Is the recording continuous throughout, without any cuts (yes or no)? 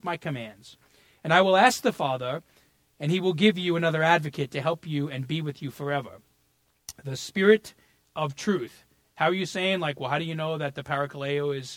yes